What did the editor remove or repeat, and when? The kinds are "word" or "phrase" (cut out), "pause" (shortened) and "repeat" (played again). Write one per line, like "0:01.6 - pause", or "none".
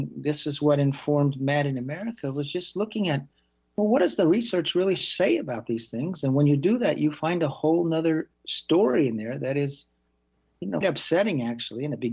0:10.8 - word